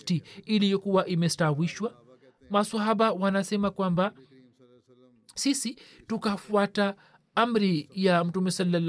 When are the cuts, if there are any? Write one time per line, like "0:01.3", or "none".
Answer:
none